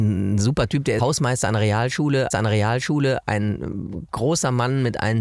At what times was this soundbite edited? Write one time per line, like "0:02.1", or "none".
0:01.0
0:02.3